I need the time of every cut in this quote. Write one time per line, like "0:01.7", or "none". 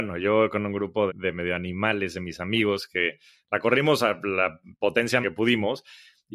0:01.1
0:05.2